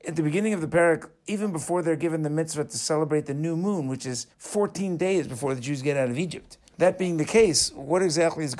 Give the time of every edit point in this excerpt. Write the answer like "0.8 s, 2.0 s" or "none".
4.3 s, 6.7 s